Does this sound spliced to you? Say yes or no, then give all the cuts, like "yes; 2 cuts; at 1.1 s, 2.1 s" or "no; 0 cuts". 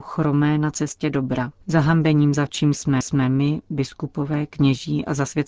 yes; 3 cuts; at 1.6 s, 2.5 s, 3.0 s